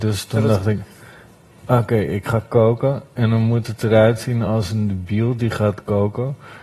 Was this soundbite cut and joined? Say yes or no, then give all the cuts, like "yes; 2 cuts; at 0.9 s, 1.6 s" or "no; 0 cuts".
no; 0 cuts